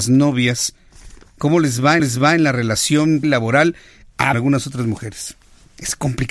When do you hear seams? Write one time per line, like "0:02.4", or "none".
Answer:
0:02.0
0:03.2
0:04.3